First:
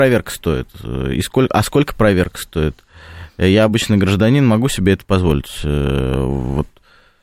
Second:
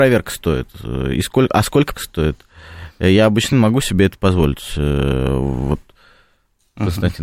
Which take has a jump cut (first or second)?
second